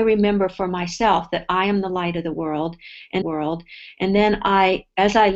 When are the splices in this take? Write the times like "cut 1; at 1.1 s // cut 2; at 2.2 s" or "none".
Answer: cut 1; at 3.2 s